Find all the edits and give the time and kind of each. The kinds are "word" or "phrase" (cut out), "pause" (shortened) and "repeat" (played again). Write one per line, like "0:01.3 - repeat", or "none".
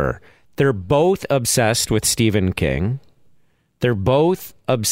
none